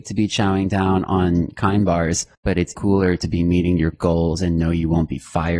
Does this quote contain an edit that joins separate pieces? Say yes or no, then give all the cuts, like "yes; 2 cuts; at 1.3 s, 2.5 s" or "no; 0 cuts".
yes; 3 cuts; at 2.3 s, 2.7 s, 3.9 s